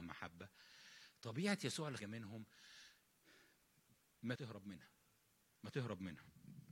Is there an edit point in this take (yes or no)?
yes